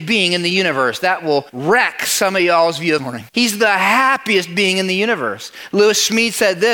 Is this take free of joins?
no; 3 cuts; at 1.5 s, 3.0 s, 3.3 s

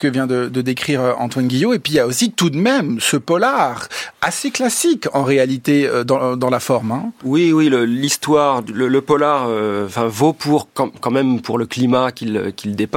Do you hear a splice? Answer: no; 0 cuts

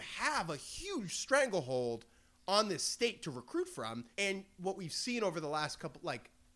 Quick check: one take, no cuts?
no; 1 cut; at 4.1 s

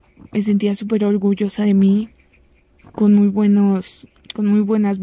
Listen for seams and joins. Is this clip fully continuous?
yes; 0 cuts

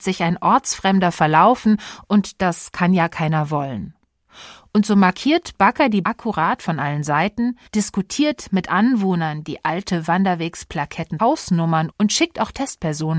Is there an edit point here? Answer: yes; 4 cuts; at 6.0 s, 7.7 s, 11.2 s, 11.9 s

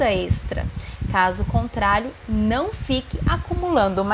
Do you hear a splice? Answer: no; 0 cuts

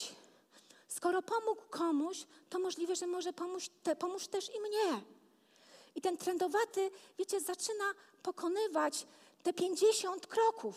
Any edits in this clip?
no; 0 cuts

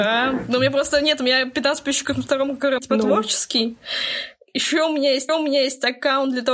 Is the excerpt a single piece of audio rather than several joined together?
no; 2 cuts; at 2.8 s, 5.3 s

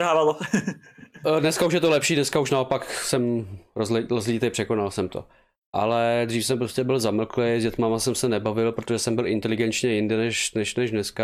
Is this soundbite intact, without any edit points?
yes; 0 cuts

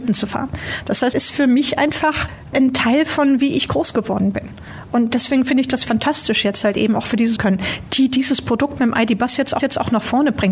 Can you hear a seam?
yes; 3 cuts; at 1.1 s, 7.4 s, 9.6 s

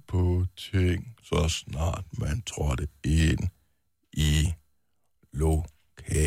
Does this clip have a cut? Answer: no; 0 cuts

